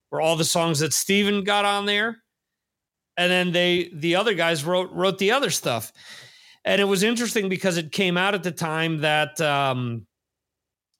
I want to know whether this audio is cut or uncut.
uncut